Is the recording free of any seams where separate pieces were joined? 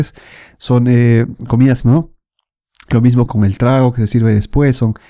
no; 2 cuts; at 1.8 s, 3.3 s

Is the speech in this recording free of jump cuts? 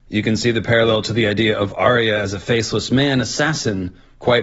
yes; 0 cuts

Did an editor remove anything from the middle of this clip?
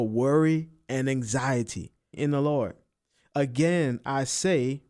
yes; 1 cut; at 2.1 s

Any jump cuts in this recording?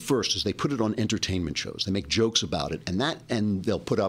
no; 0 cuts

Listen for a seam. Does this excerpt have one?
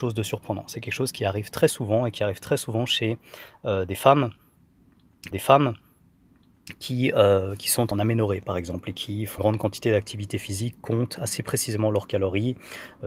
yes; 3 cuts; at 5.3 s, 7.9 s, 9.4 s

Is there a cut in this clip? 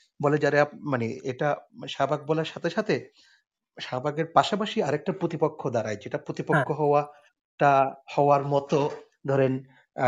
no; 0 cuts

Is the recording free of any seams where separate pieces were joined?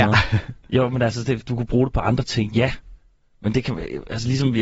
yes; 0 cuts

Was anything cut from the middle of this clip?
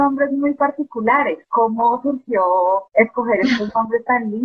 yes; 2 cuts; at 1.4 s, 2.9 s

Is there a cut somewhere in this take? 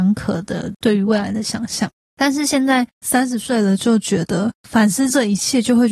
no; 0 cuts

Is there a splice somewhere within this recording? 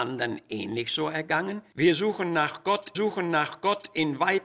yes; 1 cut; at 2.9 s

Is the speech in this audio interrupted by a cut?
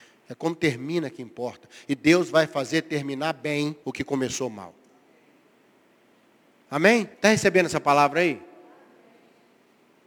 yes; 2 cuts; at 3.8 s, 7.1 s

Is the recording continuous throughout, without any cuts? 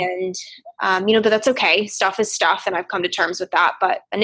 yes; 0 cuts

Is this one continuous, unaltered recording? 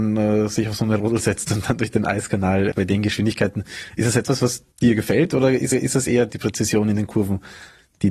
no; 4 cuts; at 2.7 s, 4.7 s, 5.7 s, 6.3 s

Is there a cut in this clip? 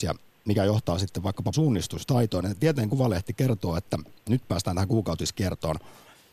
yes; 1 cut; at 1.5 s

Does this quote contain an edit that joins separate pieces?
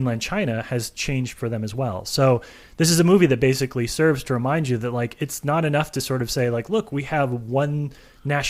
no; 0 cuts

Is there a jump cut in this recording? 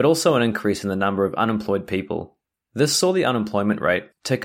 no; 0 cuts

